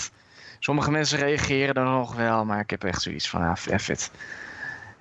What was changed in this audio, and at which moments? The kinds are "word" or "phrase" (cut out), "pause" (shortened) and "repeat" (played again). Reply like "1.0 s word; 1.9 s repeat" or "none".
none